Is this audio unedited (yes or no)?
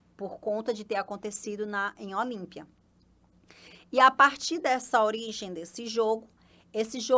yes